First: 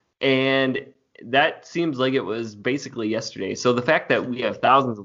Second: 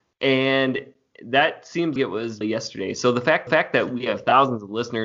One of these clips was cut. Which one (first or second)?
second